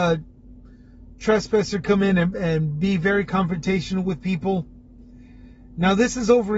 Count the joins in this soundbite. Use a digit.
1